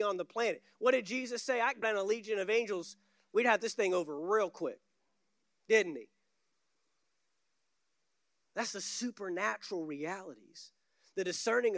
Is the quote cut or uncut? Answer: cut